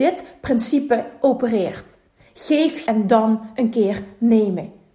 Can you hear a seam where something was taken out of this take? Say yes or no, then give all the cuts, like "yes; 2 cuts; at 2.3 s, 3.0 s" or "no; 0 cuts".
yes; 1 cut; at 2.9 s